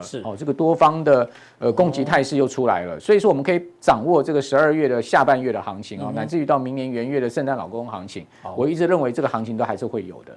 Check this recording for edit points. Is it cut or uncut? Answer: uncut